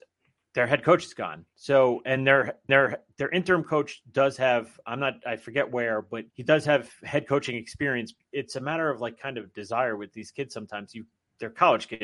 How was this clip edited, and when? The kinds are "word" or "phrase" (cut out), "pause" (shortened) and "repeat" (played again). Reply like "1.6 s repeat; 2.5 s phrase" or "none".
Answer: 2.7 s repeat; 6.3 s pause; 8.2 s word